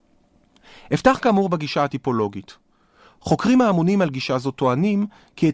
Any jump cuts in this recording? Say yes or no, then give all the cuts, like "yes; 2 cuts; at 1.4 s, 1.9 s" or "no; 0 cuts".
no; 0 cuts